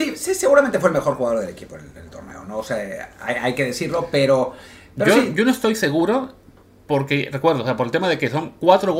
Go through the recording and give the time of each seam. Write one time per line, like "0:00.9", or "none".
none